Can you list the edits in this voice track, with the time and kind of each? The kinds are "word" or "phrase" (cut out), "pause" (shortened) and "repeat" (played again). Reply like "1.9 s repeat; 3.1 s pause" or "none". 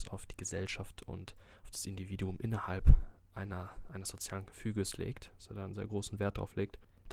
none